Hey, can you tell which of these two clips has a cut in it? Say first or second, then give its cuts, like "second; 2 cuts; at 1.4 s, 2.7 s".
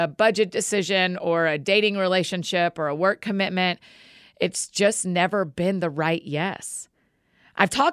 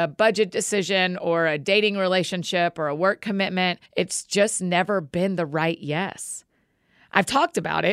second; 1 cut; at 3.9 s